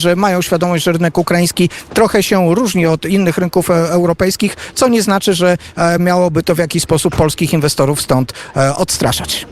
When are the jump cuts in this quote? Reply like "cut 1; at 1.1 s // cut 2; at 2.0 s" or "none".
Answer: none